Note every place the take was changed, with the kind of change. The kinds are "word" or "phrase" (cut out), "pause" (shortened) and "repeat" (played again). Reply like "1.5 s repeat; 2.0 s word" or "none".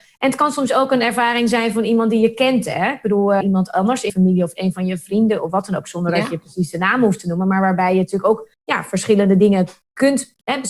3.4 s word; 4.1 s word; 8.5 s pause